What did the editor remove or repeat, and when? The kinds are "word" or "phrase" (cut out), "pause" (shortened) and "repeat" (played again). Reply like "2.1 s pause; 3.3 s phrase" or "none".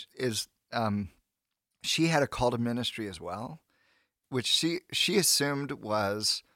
4.2 s word